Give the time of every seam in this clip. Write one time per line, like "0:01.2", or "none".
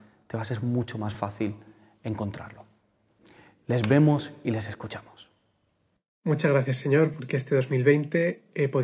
none